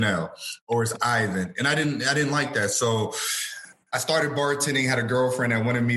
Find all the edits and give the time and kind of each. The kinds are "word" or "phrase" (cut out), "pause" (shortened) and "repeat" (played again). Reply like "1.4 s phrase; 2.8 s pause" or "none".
none